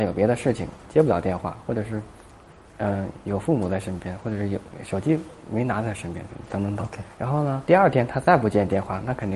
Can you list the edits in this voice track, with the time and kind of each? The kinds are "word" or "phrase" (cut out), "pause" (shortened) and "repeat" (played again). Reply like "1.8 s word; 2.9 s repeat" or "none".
7.1 s pause

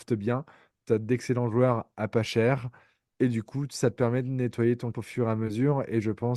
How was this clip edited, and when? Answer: 4.9 s word

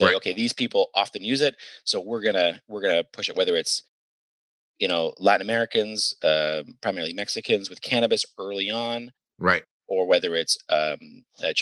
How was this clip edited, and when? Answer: none

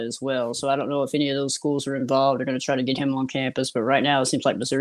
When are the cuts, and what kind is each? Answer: none

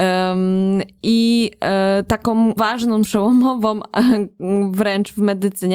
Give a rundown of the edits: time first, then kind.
2.6 s word; 3.0 s word

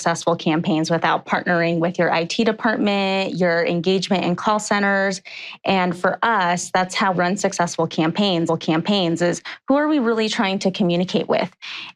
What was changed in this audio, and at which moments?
7.1 s word; 8.5 s repeat

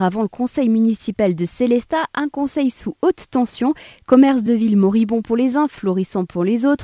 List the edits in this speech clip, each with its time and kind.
none

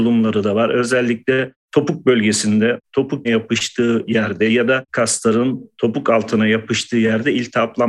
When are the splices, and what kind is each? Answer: 2.8 s word; 3.2 s word; 4.9 s word

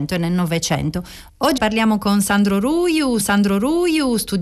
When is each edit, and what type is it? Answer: 1.6 s word; 3.2 s repeat

